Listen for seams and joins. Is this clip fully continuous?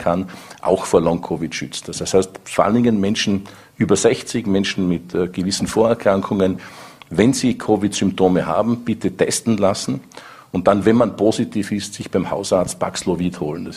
yes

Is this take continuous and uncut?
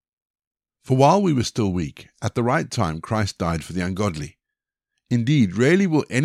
yes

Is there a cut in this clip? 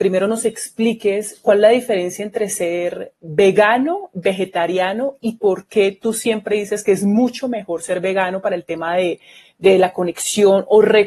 no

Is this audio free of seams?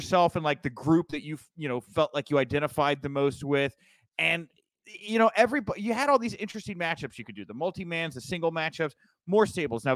yes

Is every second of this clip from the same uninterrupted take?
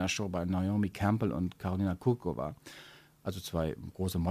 yes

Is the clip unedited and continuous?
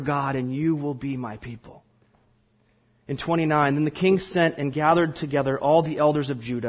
yes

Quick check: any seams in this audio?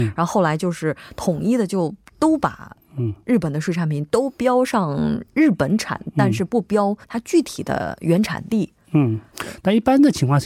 yes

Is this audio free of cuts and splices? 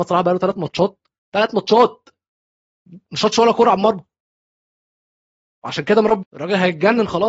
no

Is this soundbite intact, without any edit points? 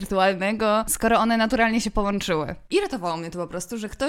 yes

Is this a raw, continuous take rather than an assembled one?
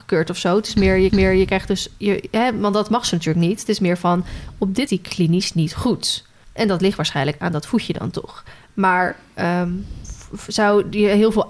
no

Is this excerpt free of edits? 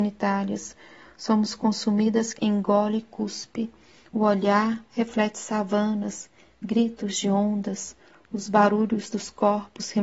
no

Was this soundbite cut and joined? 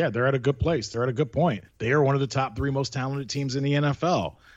yes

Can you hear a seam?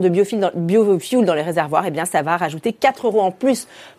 no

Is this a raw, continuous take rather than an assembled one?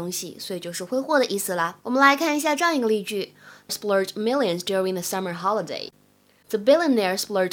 no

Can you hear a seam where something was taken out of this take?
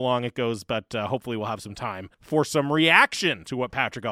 yes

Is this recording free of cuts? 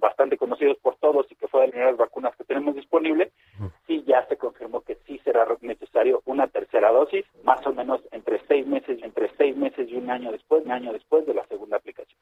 no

